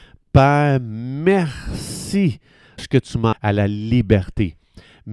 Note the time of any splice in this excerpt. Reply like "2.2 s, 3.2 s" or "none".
2.8 s, 3.3 s